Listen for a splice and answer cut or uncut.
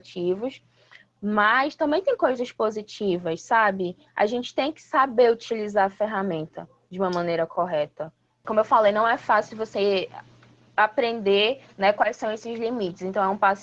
uncut